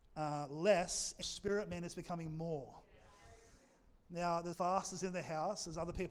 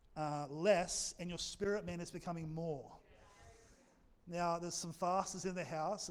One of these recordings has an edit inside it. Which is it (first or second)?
first